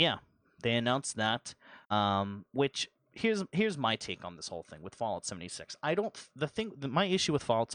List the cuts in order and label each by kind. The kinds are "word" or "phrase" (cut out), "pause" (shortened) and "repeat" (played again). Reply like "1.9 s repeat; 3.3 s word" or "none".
1.8 s pause